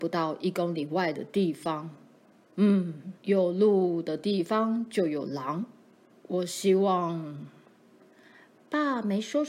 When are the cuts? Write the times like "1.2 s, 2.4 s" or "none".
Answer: 3.2 s

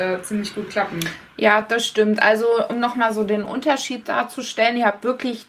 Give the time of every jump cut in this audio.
none

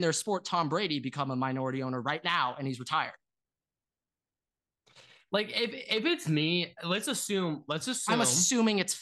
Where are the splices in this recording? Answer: none

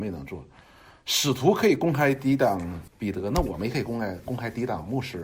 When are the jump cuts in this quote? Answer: 2.9 s

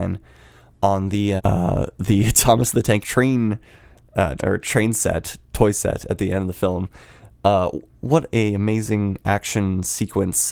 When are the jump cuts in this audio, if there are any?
1.4 s, 3.0 s, 4.4 s

